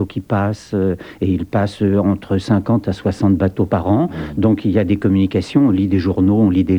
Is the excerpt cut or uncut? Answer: uncut